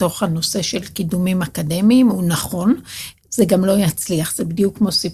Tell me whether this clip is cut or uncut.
uncut